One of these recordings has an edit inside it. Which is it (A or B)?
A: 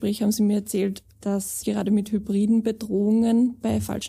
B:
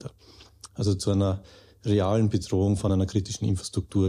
A